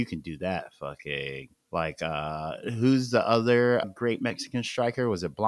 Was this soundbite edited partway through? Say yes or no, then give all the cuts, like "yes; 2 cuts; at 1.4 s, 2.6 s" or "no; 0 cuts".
yes; 2 cuts; at 1.6 s, 3.8 s